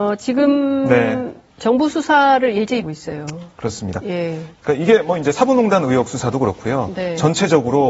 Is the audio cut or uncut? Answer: cut